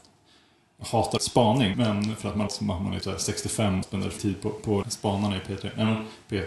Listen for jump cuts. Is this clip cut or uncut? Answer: cut